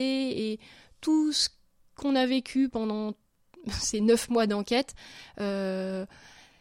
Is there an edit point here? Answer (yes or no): no